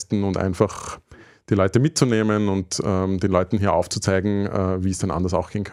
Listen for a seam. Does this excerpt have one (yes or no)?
no